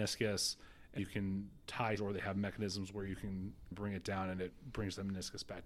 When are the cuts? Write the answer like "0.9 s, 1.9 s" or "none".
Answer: 1.0 s, 2.0 s, 3.7 s